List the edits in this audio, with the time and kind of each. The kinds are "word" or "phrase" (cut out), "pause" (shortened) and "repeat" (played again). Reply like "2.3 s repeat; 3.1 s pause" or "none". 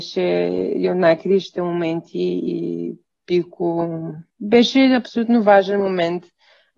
4.3 s pause